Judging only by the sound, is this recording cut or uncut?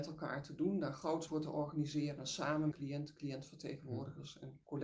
cut